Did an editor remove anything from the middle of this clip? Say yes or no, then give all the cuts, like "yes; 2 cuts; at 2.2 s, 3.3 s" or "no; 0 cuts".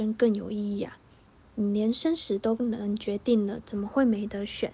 no; 0 cuts